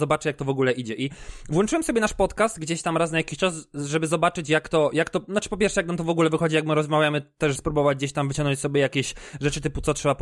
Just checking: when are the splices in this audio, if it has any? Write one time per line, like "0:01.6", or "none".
0:07.6